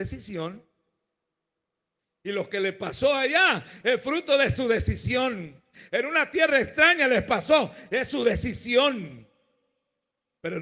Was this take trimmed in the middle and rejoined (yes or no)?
no